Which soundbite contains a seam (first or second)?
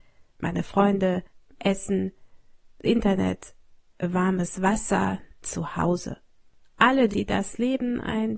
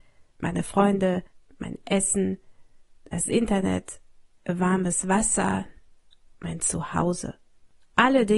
first